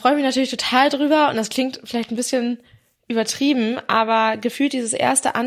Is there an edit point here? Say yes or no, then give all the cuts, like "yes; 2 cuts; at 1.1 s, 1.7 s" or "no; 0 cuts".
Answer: no; 0 cuts